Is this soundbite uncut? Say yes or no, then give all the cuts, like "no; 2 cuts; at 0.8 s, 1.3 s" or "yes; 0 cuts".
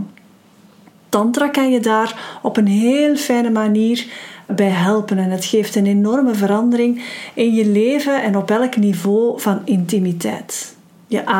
no; 1 cut; at 4.5 s